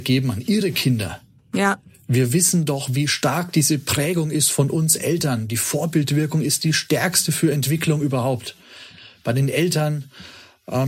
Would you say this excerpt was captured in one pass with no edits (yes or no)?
yes